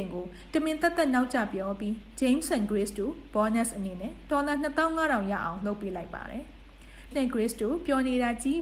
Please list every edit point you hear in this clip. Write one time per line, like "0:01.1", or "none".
0:07.1